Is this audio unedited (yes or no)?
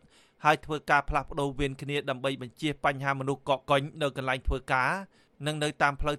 yes